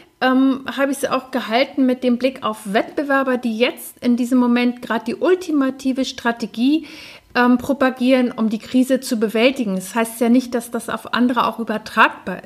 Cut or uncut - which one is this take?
uncut